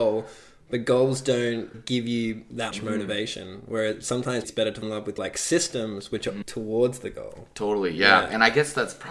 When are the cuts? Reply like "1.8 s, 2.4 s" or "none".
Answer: 1.7 s, 2.7 s, 4.4 s, 4.8 s, 5.2 s, 6.4 s